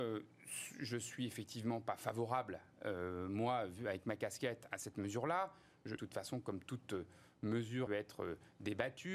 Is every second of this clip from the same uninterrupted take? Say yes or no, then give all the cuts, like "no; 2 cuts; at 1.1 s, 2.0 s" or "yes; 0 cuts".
no; 3 cuts; at 4.7 s, 6.0 s, 7.9 s